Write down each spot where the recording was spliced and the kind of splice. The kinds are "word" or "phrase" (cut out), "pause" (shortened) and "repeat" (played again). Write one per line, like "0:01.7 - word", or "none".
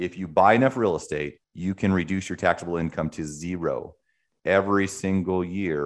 0:01.4 - pause